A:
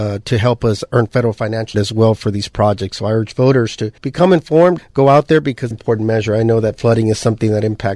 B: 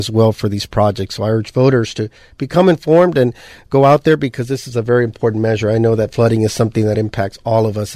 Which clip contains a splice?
A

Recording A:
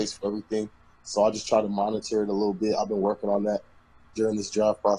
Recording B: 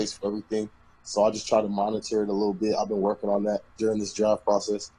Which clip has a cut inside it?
B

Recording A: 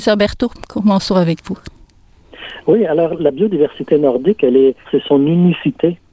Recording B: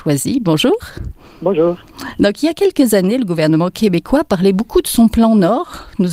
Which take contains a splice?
A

